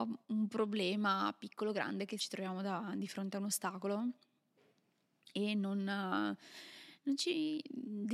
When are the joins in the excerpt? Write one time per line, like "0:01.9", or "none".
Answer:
0:02.2